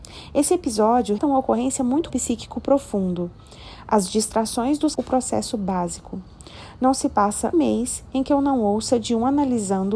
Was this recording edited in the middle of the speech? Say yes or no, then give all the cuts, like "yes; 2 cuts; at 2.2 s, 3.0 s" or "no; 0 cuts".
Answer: yes; 4 cuts; at 1.2 s, 2.1 s, 5.0 s, 7.5 s